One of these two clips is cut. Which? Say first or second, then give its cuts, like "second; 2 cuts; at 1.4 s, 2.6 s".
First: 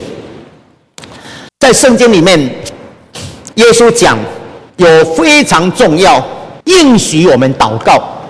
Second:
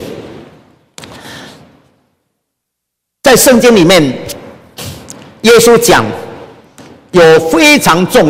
first; 4 cuts; at 1.5 s, 3.5 s, 4.7 s, 6.6 s